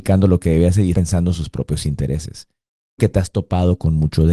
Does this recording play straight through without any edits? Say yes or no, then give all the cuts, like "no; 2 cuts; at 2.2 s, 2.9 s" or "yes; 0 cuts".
no; 2 cuts; at 0.9 s, 3.0 s